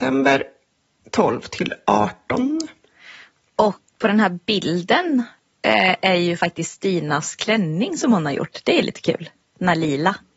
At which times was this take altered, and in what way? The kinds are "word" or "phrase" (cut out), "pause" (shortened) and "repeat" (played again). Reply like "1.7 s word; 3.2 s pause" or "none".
4.0 s word